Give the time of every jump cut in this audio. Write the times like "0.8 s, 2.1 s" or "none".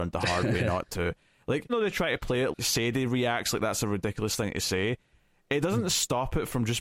1.7 s, 2.5 s